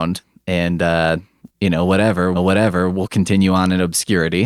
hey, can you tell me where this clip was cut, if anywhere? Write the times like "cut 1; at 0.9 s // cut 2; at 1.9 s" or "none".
cut 1; at 1.4 s // cut 2; at 2.3 s